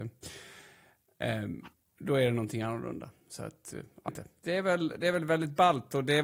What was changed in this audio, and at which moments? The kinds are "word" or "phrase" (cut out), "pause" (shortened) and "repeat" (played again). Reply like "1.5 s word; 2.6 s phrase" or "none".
4.1 s phrase

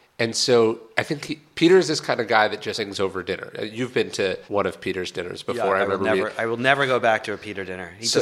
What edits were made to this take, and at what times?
2.7 s phrase; 4.5 s pause

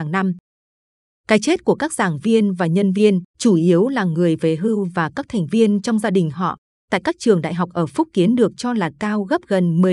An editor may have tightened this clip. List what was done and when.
3.3 s pause

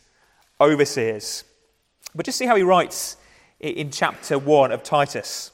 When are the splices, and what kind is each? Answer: none

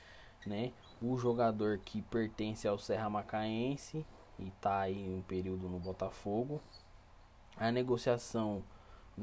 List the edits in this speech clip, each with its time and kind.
none

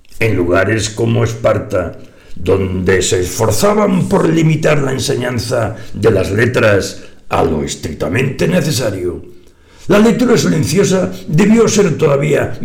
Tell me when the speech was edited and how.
none

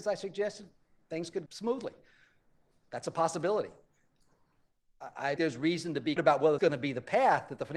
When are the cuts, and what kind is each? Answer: 1.5 s word; 5.4 s word; 6.2 s word; 6.6 s word

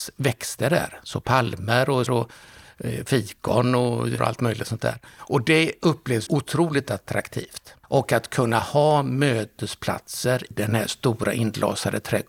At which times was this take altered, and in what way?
2.1 s word; 4.2 s word; 6.3 s word; 7.8 s pause; 10.5 s word

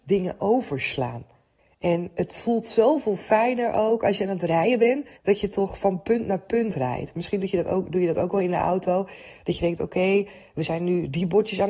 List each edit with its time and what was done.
1.6 s pause; 5.2 s pause

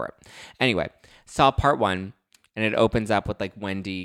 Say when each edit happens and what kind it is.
none

